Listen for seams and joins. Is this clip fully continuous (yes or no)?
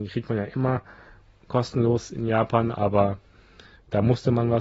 yes